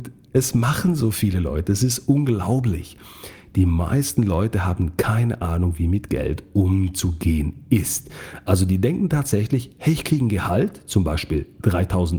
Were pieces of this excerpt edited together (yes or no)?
no